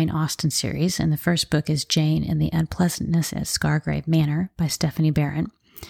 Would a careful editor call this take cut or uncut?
uncut